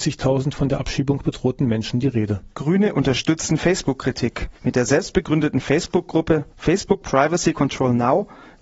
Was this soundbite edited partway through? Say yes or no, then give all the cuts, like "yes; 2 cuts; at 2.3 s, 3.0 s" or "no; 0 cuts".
yes; 3 cuts; at 2.5 s, 4.6 s, 6.5 s